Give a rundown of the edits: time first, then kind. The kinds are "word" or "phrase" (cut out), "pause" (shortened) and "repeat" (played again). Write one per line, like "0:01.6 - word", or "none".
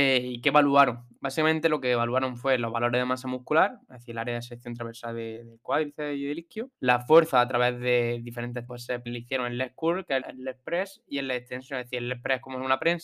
0:06.7 - pause
0:08.7 - phrase
0:09.1 - word
0:10.2 - phrase